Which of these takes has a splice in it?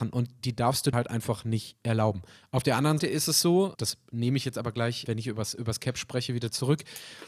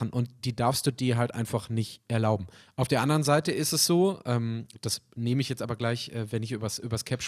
first; 4 cuts; at 0.9 s, 3.0 s, 3.7 s, 5.1 s

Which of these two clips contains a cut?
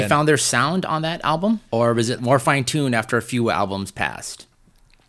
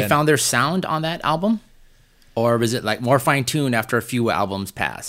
first; 2 cuts; at 1.7 s, 2.2 s

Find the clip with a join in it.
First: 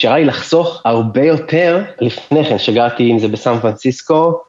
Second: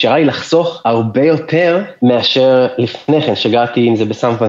first; 1 cut; at 2.0 s

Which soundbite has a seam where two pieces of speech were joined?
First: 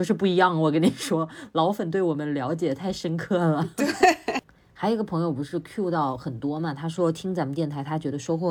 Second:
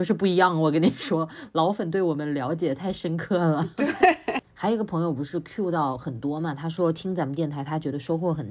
second; 1 cut; at 4.4 s

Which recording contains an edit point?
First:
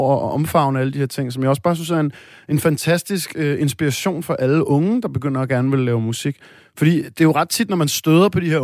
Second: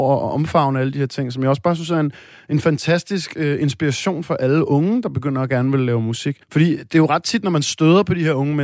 second; 1 cut; at 6.4 s

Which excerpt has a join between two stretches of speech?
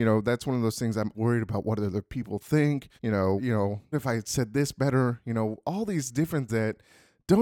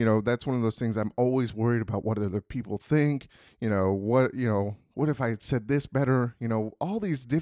first; 5 cuts; at 1.1 s, 3.0 s, 3.4 s, 3.9 s, 6.5 s

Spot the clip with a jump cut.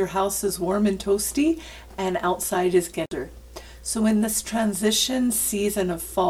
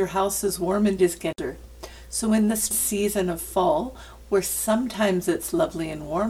second; 2 cuts; at 1.0 s, 2.7 s

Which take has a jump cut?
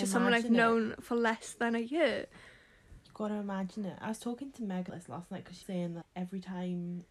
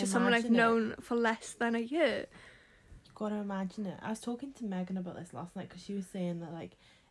first; 3 cuts; at 4.9 s, 5.6 s, 6.0 s

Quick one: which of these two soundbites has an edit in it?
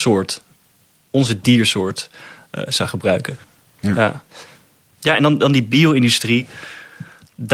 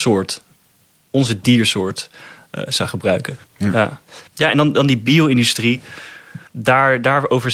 second; 3 cuts; at 3.5 s, 4.3 s, 6.5 s

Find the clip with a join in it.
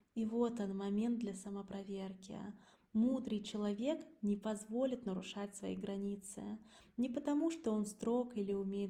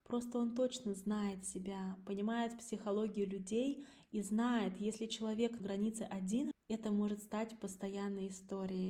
second; 2 cuts; at 5.6 s, 6.5 s

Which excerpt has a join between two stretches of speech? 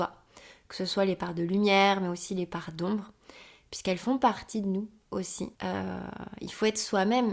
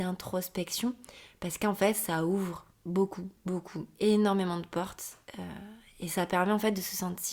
first; 1 cut; at 5.5 s

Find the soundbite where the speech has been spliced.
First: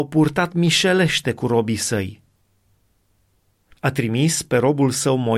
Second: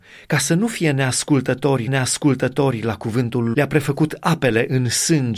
second; 2 cuts; at 1.9 s, 3.5 s

